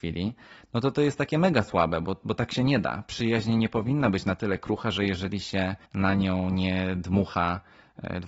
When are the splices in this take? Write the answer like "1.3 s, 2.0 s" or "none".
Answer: 5.8 s

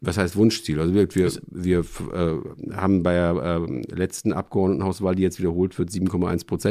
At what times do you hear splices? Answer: none

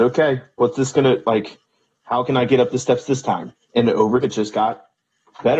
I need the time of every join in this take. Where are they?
3.6 s, 4.2 s

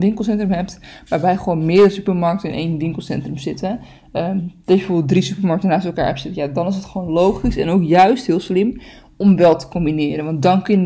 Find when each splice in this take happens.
none

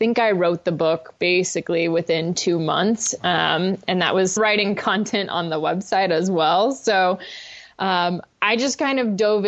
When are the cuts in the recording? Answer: 1.2 s, 4.4 s

